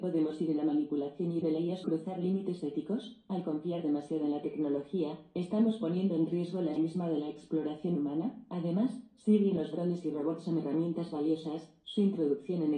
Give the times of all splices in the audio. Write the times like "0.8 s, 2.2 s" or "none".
1.4 s, 1.8 s, 6.8 s